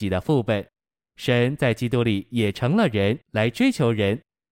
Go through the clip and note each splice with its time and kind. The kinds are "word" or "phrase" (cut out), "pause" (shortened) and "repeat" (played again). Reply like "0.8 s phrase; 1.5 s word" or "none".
3.2 s pause

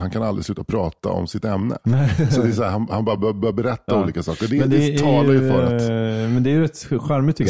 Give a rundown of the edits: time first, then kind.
none

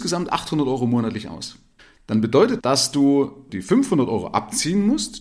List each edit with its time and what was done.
1.8 s pause; 2.6 s word

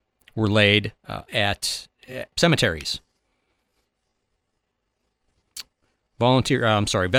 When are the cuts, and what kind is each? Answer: 1.0 s pause; 2.3 s word

